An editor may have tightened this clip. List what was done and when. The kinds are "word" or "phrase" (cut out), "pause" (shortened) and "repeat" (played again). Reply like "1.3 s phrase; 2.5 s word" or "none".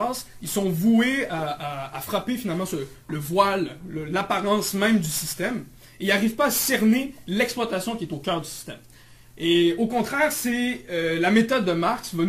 none

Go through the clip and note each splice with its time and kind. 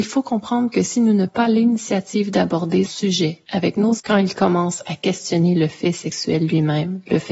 1.3 s word; 2.9 s word; 4.0 s word

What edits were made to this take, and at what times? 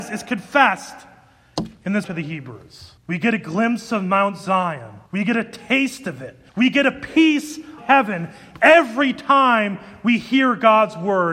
2.0 s word; 3.0 s pause; 5.1 s pause; 6.5 s pause; 7.8 s word

